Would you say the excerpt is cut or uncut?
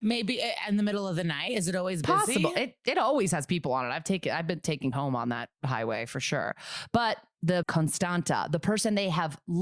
cut